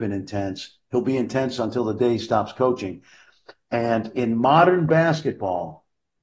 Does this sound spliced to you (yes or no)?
no